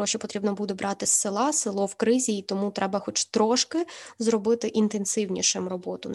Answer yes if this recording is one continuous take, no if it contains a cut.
yes